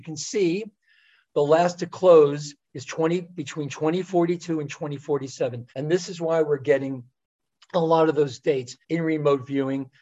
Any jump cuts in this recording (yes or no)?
yes